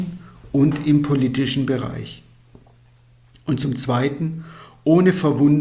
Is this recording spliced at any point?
no; 0 cuts

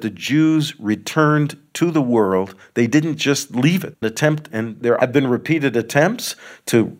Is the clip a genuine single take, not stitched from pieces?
no; 2 cuts; at 4.0 s, 4.5 s

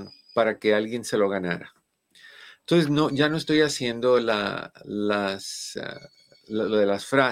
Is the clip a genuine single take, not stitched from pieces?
yes; 0 cuts

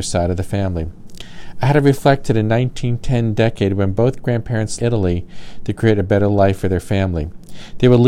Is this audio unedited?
no; 1 cut; at 4.8 s

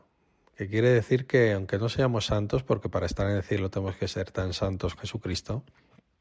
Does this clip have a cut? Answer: yes; 1 cut; at 5.0 s

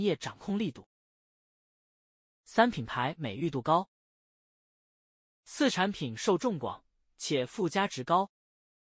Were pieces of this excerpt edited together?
no; 0 cuts

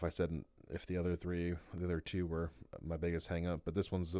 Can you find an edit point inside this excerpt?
no; 0 cuts

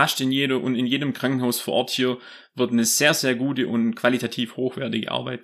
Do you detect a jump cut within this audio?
no; 0 cuts

